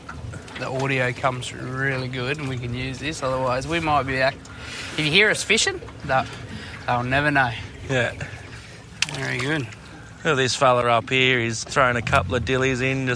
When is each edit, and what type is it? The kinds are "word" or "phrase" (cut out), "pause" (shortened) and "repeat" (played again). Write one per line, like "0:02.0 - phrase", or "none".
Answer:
0:11.6 - word